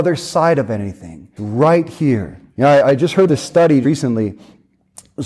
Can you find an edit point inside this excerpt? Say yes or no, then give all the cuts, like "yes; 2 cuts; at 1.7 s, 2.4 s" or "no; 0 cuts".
yes; 4 cuts; at 1.4 s, 2.5 s, 3.3 s, 3.8 s